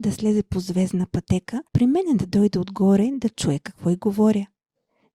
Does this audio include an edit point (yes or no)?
yes